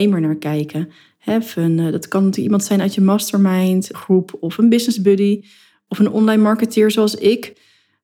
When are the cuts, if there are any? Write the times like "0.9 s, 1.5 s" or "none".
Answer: 3.9 s